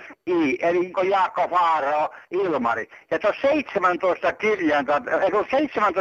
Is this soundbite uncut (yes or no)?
no